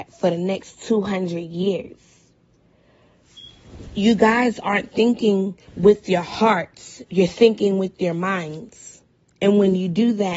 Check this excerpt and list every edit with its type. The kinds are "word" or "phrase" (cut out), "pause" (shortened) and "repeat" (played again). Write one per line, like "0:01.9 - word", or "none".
0:05.7 - pause
0:09.1 - pause